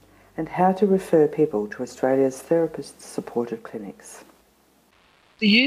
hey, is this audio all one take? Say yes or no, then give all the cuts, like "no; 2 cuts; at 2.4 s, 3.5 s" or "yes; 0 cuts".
yes; 0 cuts